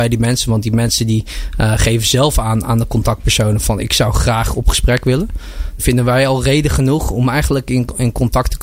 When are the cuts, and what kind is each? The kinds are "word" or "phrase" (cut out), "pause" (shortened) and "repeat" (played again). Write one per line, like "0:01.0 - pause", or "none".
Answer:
0:05.8 - phrase